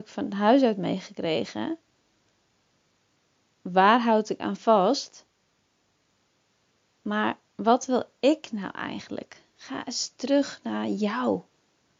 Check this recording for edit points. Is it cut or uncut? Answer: uncut